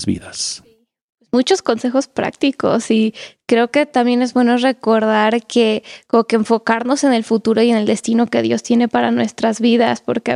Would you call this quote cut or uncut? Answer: uncut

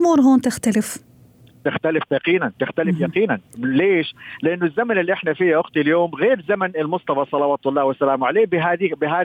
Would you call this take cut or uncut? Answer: uncut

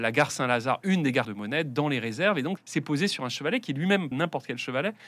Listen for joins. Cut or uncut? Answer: cut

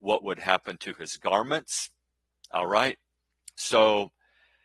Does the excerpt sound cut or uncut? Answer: uncut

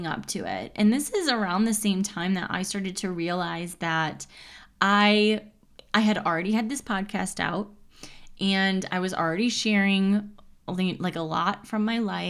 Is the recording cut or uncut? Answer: uncut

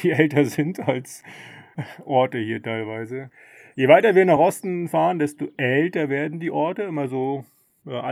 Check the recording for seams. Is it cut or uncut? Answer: uncut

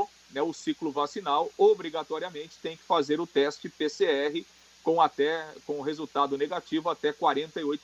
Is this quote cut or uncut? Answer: uncut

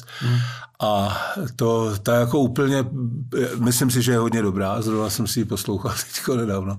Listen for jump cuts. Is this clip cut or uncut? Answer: uncut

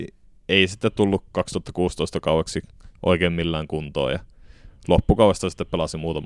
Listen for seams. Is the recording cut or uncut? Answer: uncut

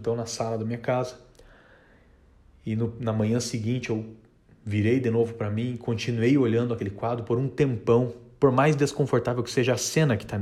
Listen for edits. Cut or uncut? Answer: uncut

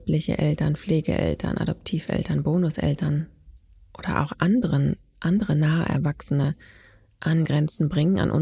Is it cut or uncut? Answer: cut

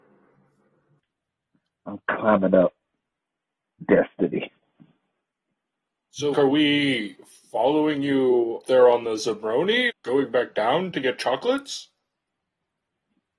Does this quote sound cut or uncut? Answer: cut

